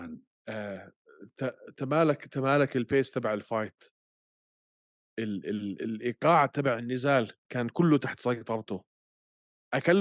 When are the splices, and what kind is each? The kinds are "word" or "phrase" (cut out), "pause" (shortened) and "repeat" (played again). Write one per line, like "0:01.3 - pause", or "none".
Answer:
none

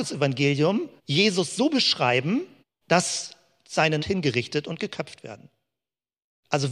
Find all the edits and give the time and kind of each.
0:01.0 - pause
0:02.6 - pause
0:04.0 - phrase

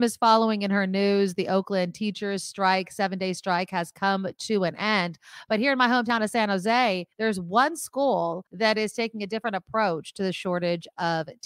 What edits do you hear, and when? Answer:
0:07.1 - pause
0:08.5 - pause

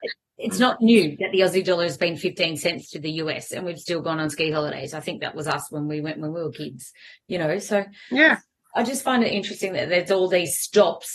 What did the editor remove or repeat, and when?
none

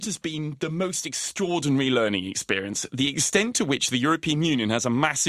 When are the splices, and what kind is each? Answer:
none

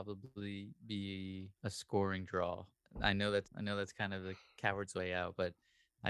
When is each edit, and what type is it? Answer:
0:01.6 - pause
0:02.8 - pause
0:03.5 - word

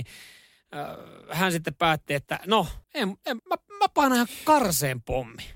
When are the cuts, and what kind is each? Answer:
0:02.8 - pause
0:03.4 - word

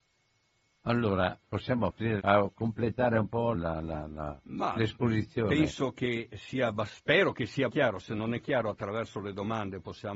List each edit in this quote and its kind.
0:01.4 - word
0:02.2 - phrase
0:03.5 - word
0:07.7 - word

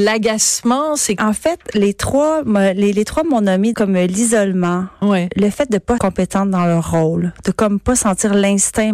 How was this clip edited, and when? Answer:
0:01.2 - phrase
0:03.7 - phrase
0:06.0 - phrase

